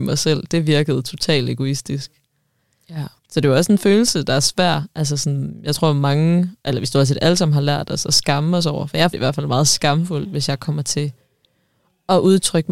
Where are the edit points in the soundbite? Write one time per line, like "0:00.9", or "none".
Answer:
0:03.2
0:09.1